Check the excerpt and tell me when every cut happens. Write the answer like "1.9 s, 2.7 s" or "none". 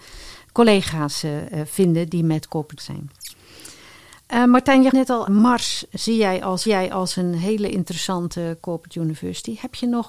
2.8 s, 4.9 s, 5.3 s, 6.7 s